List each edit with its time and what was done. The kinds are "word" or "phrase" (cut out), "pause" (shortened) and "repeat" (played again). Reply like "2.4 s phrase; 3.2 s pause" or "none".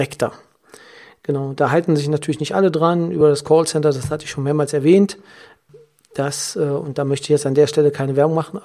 none